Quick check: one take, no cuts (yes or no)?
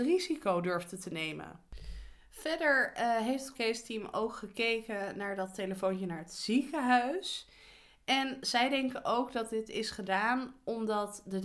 no